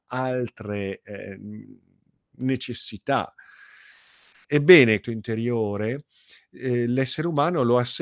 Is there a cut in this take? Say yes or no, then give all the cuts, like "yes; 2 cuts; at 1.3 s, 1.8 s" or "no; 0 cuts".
yes; 1 cut; at 5.0 s